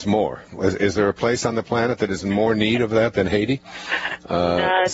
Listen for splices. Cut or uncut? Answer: uncut